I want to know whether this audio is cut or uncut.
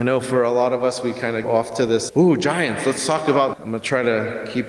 cut